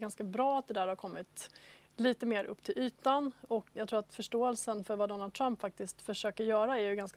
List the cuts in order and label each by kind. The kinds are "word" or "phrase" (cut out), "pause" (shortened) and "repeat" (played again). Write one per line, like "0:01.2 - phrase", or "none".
0:03.8 - word